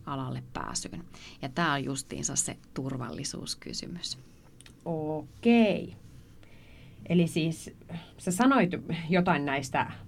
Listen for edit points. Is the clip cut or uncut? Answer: cut